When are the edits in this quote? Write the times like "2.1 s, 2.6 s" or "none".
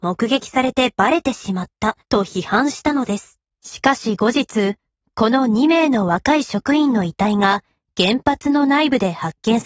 2.0 s, 3.4 s